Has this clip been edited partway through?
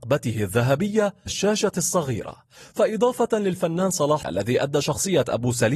yes; 2 cuts; at 1.3 s, 4.2 s

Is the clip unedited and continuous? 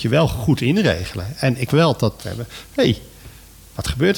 no; 2 cuts; at 1.7 s, 2.2 s

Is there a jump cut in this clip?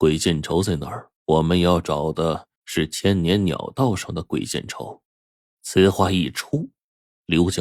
yes; 3 cuts; at 1.2 s, 2.6 s, 5.1 s

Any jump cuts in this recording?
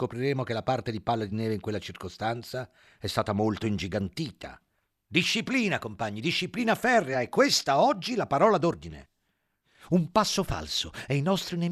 no; 0 cuts

